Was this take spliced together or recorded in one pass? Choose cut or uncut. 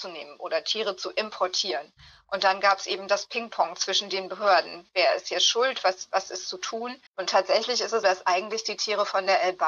cut